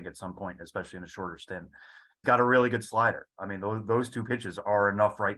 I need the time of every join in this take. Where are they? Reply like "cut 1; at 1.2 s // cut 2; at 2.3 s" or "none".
cut 1; at 2.2 s